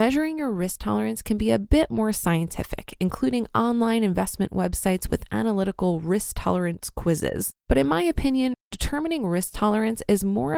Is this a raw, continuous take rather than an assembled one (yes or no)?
no